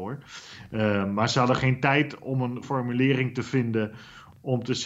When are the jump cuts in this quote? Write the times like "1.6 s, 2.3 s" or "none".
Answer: 2.6 s